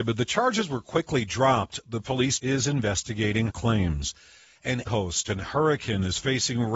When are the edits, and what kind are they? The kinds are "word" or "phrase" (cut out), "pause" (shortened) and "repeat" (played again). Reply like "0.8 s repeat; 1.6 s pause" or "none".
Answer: 2.4 s word; 3.5 s word; 4.9 s word

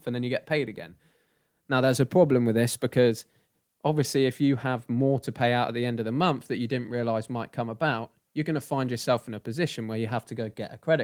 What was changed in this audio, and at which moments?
none

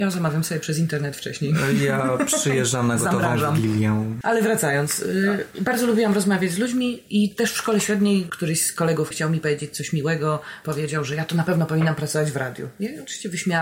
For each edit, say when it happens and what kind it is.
9.1 s word

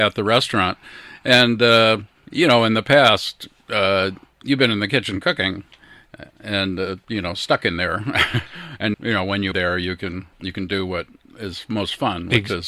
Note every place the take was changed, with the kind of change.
8.9 s word; 9.5 s word; 10.3 s pause

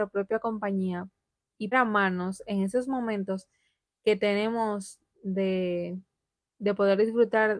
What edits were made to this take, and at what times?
1.7 s word

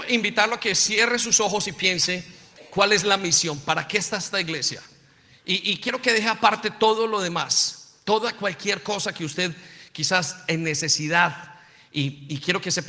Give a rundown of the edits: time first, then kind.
none

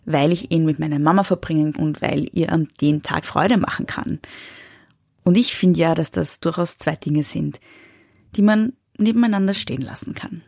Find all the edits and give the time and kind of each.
1.7 s word; 2.3 s word; 3.2 s word

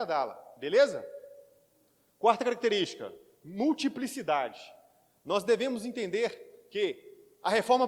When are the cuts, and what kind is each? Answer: none

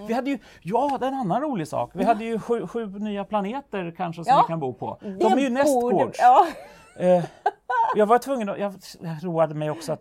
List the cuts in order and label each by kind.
none

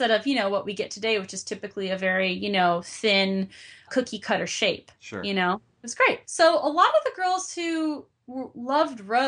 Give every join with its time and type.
3.9 s word; 6.2 s pause

